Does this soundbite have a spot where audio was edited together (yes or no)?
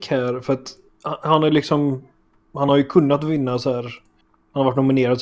no